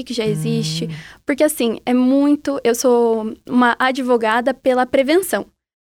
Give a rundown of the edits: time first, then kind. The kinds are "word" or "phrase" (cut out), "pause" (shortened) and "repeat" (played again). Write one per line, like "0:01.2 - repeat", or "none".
none